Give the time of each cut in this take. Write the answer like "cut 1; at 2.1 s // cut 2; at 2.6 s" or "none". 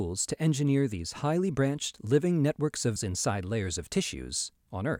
cut 1; at 3.0 s